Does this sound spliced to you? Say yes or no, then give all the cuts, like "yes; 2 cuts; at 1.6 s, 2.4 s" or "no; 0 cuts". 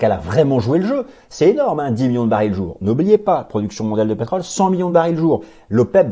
no; 0 cuts